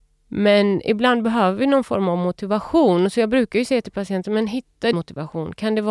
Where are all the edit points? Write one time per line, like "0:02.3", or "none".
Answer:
0:04.9